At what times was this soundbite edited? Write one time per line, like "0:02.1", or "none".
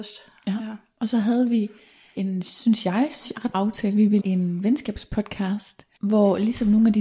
0:02.1
0:03.5
0:04.2
0:06.0